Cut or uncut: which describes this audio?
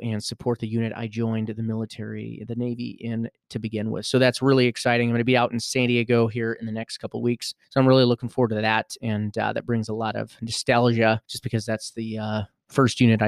cut